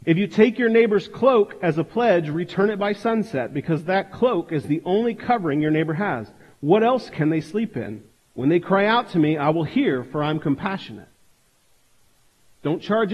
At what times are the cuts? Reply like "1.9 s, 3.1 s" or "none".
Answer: none

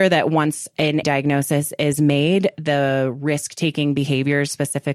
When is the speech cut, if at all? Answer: 1.0 s

